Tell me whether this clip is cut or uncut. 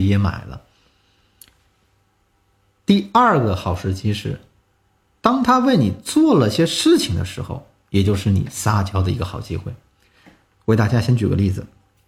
uncut